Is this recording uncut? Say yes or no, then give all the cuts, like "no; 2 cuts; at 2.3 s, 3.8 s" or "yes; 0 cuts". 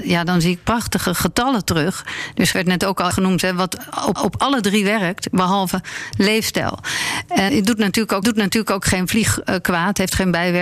no; 5 cuts; at 2.5 s, 3.1 s, 4.2 s, 7.5 s, 8.2 s